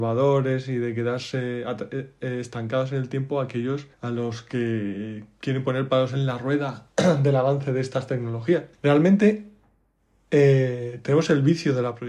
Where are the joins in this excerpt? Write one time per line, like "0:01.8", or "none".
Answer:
0:03.9
0:08.7